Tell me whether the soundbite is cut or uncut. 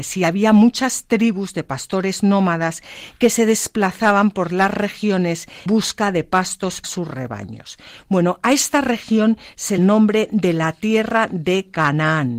cut